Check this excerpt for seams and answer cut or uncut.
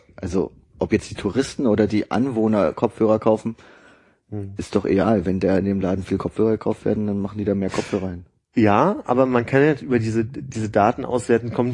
uncut